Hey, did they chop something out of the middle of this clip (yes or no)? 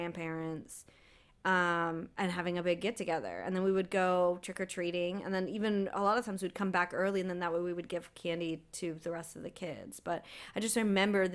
no